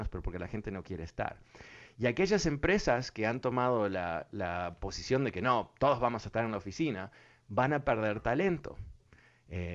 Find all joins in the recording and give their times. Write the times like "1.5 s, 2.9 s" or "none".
none